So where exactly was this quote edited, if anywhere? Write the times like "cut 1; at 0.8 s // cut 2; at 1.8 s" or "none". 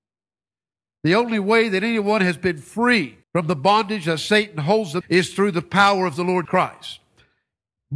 cut 1; at 3.2 s // cut 2; at 5.0 s // cut 3; at 6.4 s